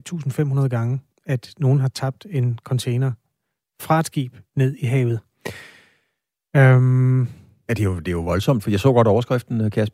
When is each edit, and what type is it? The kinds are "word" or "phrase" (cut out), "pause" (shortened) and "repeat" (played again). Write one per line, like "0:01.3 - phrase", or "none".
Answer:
none